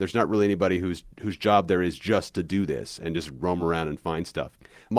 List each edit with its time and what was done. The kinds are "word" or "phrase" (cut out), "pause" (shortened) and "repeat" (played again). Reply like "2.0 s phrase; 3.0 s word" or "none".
none